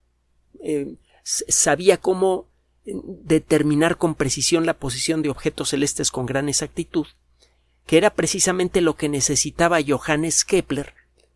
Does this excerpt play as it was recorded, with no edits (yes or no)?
yes